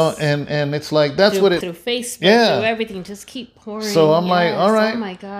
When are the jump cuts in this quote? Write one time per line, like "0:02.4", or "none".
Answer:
0:01.6